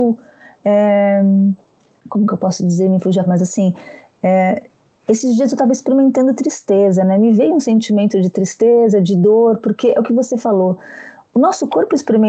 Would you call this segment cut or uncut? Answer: cut